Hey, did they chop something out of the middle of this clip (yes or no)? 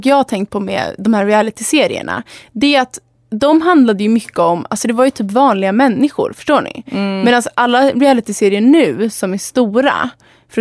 no